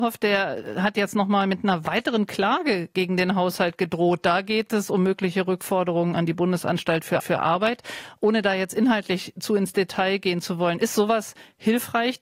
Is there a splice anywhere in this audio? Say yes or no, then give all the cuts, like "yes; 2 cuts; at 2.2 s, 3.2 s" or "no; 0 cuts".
yes; 1 cut; at 7.2 s